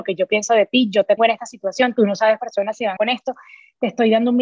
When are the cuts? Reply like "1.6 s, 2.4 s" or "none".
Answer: 1.2 s, 2.4 s, 3.0 s